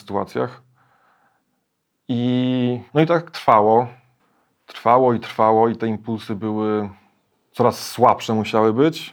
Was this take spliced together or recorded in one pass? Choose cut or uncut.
cut